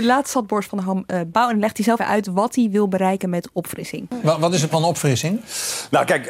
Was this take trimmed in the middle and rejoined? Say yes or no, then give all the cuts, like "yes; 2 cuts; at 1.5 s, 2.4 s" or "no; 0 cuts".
yes; 3 cuts; at 1.3 s, 2.0 s, 4.7 s